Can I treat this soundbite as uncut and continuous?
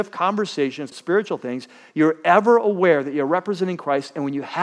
no; 1 cut; at 0.9 s

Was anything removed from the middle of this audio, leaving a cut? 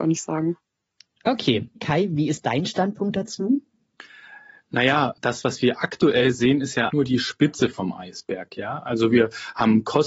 yes; 2 cuts; at 5.2 s, 6.9 s

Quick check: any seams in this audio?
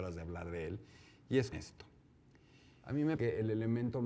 yes; 2 cuts; at 1.5 s, 3.2 s

